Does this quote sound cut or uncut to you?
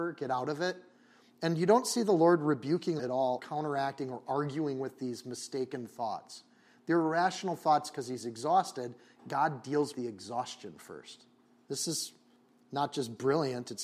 cut